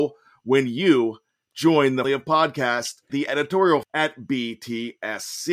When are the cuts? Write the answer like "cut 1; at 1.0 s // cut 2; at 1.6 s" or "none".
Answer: cut 1; at 2.0 s // cut 2; at 3.1 s // cut 3; at 3.8 s